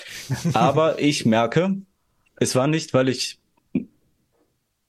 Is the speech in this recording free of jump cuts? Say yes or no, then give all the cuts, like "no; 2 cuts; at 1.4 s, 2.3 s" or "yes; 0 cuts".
yes; 0 cuts